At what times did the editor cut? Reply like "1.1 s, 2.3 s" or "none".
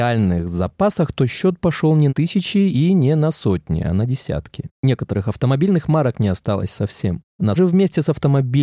2.1 s, 7.6 s